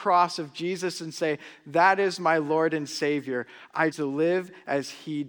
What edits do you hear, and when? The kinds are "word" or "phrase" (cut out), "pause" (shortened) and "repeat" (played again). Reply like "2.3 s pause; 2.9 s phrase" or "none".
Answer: 3.9 s word

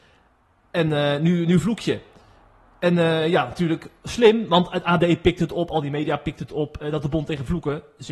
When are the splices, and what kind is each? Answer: none

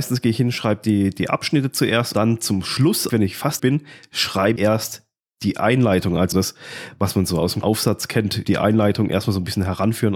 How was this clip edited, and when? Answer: 2.1 s word; 3.1 s word; 3.6 s word; 4.6 s word; 6.3 s word; 7.6 s word; 8.4 s word

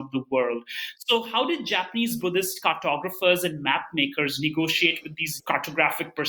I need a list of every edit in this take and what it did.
5.4 s word

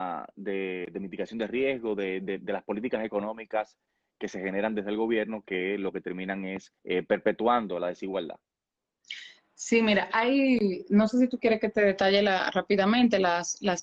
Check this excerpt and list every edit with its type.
6.8 s pause

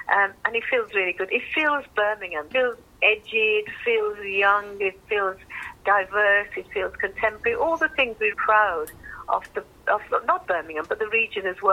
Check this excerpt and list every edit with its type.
8.3 s word; 10.4 s word

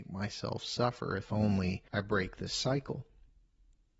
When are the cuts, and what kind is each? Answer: 1.9 s pause

